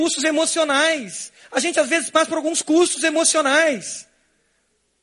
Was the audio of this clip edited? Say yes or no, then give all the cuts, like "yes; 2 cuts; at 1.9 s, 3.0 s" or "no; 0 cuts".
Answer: no; 0 cuts